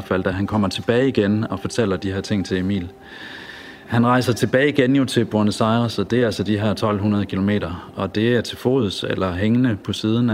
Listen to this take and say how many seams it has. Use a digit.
1